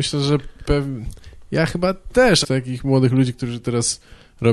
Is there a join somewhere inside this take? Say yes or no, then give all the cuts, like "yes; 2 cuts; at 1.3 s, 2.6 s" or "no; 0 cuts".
yes; 1 cut; at 2.4 s